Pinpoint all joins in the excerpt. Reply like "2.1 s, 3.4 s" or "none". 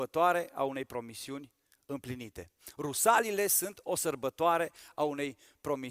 none